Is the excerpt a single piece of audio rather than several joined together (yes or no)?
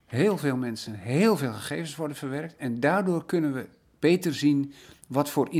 yes